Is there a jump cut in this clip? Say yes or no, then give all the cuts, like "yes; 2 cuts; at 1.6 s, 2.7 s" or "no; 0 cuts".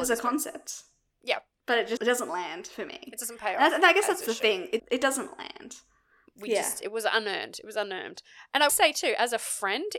yes; 3 cuts; at 2.0 s, 4.8 s, 8.7 s